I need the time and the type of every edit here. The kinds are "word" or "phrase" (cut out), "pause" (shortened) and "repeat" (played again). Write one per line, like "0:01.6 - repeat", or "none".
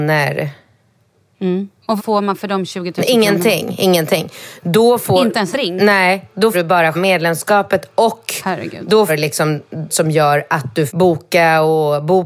0:02.0 - word
0:05.5 - word
0:06.5 - word
0:06.9 - word
0:09.1 - word
0:09.9 - word
0:10.9 - word